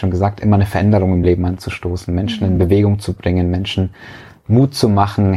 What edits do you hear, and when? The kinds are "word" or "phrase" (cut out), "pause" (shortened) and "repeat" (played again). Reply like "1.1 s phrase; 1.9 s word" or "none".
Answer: none